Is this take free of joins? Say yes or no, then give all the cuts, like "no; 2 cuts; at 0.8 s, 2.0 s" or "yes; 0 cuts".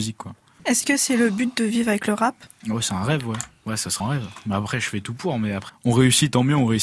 no; 2 cuts; at 4.0 s, 5.7 s